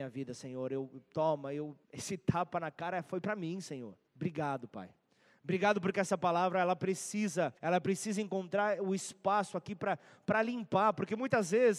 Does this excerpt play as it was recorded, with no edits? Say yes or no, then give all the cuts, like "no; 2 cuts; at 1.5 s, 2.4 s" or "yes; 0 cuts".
no; 3 cuts; at 1.8 s, 4.1 s, 7.6 s